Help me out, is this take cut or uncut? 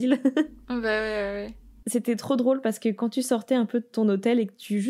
uncut